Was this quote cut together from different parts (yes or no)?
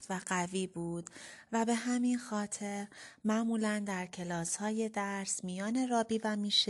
no